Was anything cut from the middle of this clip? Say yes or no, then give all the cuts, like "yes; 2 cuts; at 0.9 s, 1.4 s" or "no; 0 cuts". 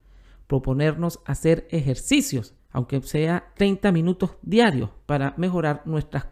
yes; 1 cut; at 2.6 s